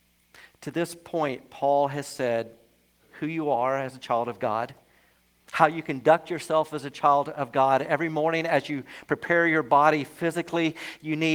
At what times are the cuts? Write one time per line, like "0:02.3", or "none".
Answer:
none